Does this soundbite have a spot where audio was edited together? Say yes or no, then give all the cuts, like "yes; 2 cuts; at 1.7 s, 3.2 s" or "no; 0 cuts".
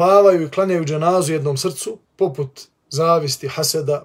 yes; 1 cut; at 2.1 s